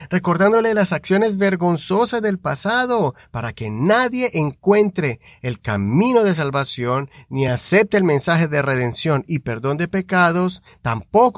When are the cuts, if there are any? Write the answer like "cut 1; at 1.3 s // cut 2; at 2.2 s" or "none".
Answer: none